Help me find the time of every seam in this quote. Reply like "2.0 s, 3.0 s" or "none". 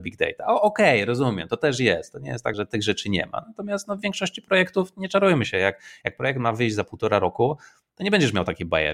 2.5 s